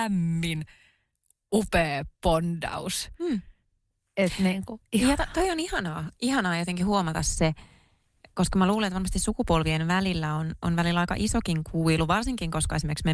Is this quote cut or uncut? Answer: uncut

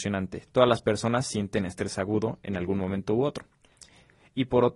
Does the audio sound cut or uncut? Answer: uncut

